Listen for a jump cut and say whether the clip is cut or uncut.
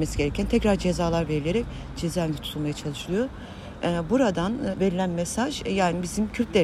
cut